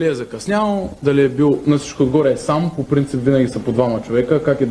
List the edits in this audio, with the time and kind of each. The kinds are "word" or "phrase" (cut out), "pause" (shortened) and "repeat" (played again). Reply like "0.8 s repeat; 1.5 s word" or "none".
none